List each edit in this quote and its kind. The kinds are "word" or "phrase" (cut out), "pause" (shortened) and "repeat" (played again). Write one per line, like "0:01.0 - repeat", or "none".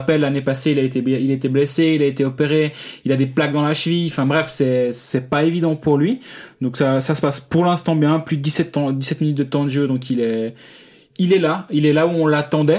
none

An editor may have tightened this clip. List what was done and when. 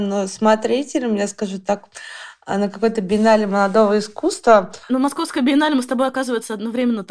0:04.8 - pause

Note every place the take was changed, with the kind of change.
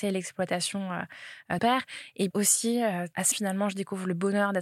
0:01.6 - word
0:02.3 - word
0:03.3 - word

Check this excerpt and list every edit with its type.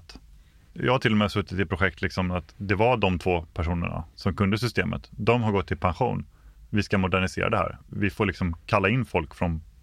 none

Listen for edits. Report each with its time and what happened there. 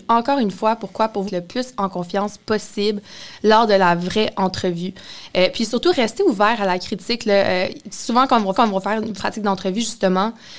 0:01.3 - word
0:08.5 - repeat
0:09.2 - phrase

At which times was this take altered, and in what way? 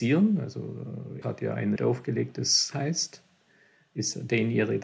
0:01.2 - word
0:01.8 - word
0:02.7 - word

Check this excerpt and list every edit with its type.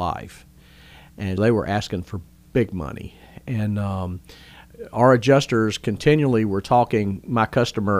0:01.4 - word

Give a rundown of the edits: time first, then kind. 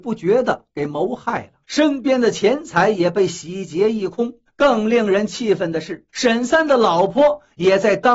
0:01.6 - pause
0:04.5 - pause
0:06.1 - pause

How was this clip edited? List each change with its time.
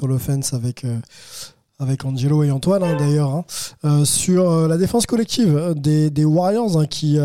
none

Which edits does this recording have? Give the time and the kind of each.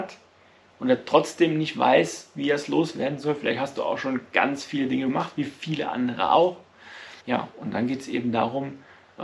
0:07.2 - pause

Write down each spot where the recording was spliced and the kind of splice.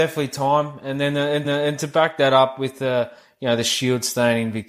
0:01.4 - repeat

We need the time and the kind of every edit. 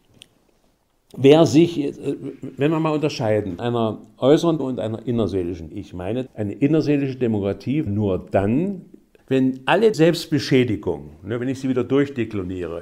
0:03.6 - word
0:04.6 - word
0:05.7 - word
0:06.3 - word
0:07.9 - word
0:09.2 - word
0:09.9 - word

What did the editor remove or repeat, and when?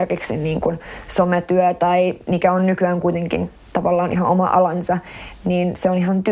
none

